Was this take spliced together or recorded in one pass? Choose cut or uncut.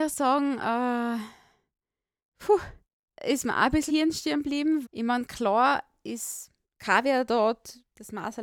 cut